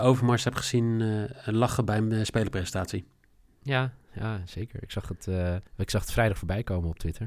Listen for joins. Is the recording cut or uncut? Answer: cut